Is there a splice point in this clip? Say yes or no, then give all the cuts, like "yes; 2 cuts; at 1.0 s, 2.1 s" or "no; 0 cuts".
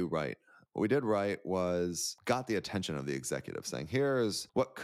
no; 0 cuts